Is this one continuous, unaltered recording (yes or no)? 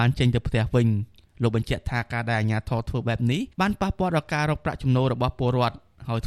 no